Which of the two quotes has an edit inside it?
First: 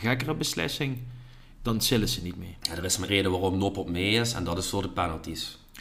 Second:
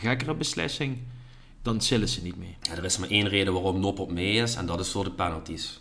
first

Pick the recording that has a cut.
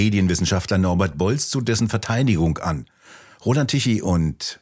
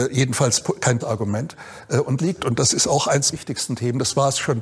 second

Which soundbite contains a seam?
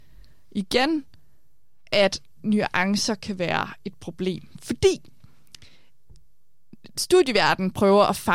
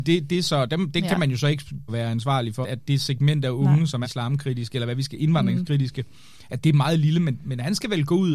second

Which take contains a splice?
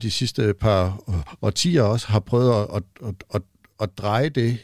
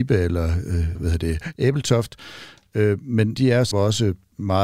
second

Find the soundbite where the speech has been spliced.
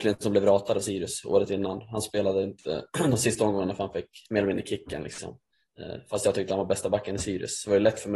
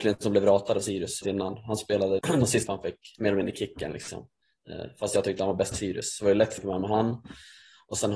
second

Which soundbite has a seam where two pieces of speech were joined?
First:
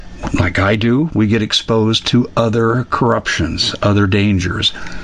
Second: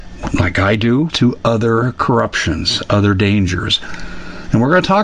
second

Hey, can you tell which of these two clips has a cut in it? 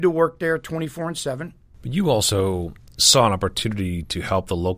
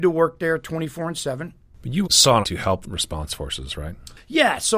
second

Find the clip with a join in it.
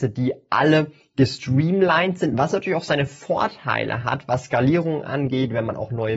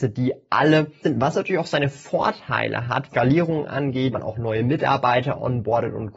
second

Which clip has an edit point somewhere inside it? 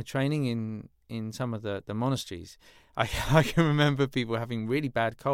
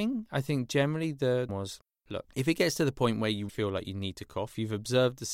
second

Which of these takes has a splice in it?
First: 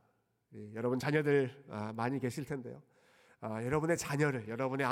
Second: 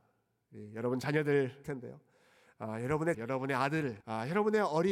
second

